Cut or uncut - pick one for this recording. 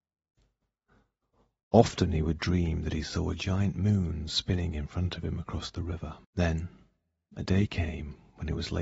cut